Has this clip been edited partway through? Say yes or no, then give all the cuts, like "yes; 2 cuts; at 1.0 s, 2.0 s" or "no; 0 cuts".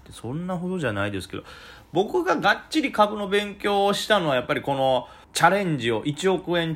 yes; 1 cut; at 5.2 s